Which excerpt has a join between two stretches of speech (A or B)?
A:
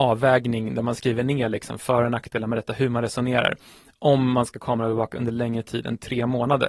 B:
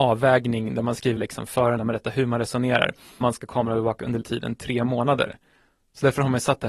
B